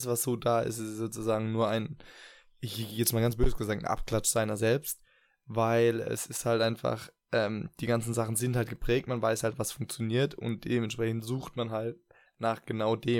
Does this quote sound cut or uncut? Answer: uncut